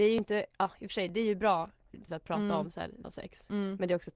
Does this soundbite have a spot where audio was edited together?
yes; 2 cuts; at 2.1 s, 3.0 s

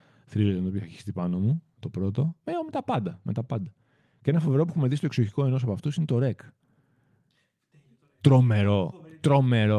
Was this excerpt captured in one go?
yes; 0 cuts

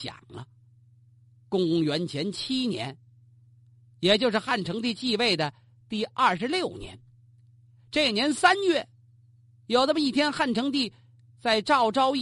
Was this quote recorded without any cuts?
yes; 0 cuts

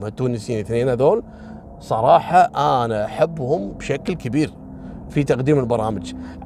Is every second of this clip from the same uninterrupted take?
yes; 0 cuts

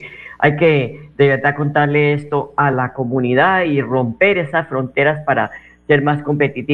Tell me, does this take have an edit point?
no; 0 cuts

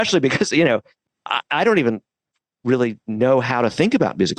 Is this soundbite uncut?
yes; 0 cuts

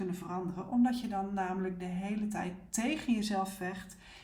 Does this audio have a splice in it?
no; 0 cuts

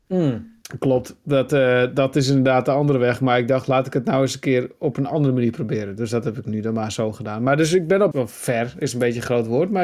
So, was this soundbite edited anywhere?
yes; 1 cut; at 8.1 s

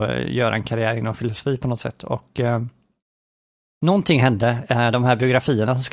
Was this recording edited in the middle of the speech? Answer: no; 0 cuts

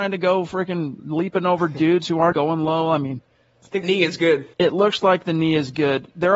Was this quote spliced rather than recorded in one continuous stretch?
yes; 3 cuts; at 2.3 s, 3.8 s, 4.5 s

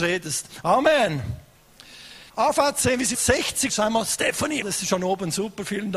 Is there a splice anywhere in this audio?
yes; 4 cuts; at 2.3 s, 3.1 s, 3.7 s, 4.6 s

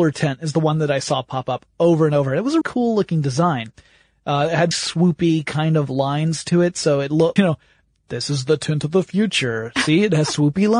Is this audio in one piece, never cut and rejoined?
no; 3 cuts; at 2.6 s, 4.7 s, 7.4 s

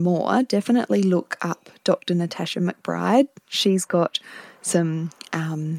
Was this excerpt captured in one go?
yes; 0 cuts

